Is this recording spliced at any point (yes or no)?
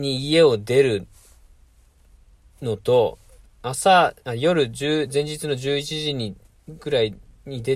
yes